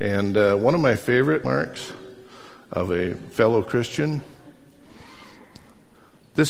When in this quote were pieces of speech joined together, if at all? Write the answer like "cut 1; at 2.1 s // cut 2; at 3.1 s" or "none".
cut 1; at 1.4 s